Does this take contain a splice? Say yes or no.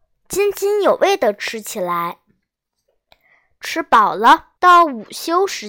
yes